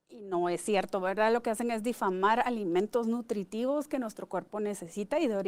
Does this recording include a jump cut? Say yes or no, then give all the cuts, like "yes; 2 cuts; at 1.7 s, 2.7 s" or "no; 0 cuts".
no; 0 cuts